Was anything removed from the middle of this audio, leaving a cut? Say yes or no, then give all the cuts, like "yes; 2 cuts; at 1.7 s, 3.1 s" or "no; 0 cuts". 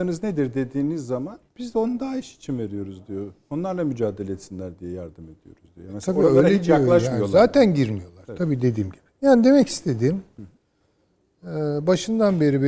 yes; 1 cut; at 1.5 s